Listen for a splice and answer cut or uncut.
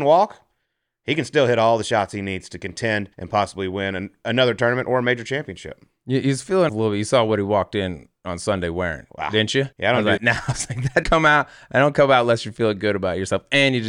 cut